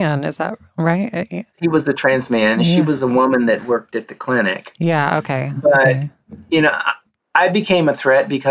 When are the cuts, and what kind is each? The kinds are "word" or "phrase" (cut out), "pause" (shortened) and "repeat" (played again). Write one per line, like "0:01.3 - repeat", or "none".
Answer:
none